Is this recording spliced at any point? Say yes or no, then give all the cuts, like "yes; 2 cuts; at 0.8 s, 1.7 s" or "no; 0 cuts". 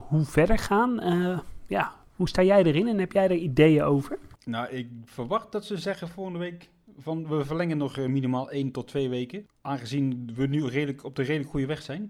no; 0 cuts